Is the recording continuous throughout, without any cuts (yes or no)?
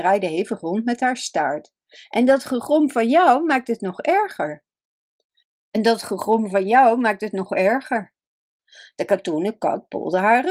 yes